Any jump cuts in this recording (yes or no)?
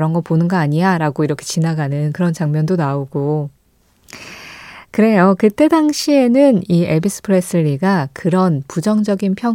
no